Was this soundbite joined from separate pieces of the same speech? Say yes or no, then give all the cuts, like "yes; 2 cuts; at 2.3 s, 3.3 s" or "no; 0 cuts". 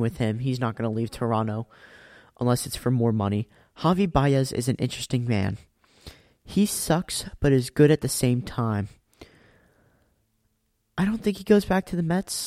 no; 0 cuts